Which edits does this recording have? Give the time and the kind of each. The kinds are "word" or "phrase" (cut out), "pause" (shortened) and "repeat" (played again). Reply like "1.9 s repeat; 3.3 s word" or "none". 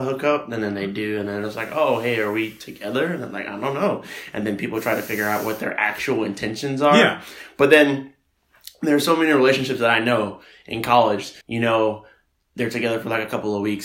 11.4 s pause